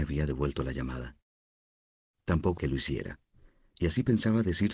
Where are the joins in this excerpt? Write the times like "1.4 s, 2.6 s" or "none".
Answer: 2.6 s